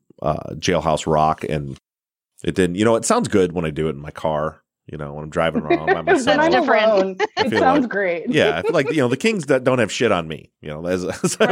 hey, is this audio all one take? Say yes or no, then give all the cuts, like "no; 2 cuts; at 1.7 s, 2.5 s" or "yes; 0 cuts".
yes; 0 cuts